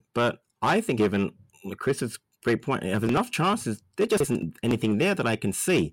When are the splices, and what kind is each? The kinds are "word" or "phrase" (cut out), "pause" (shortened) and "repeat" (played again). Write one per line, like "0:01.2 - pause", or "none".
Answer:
0:01.0 - phrase